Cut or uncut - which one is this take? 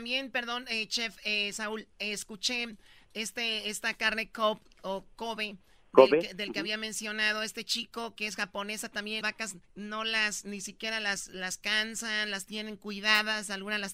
cut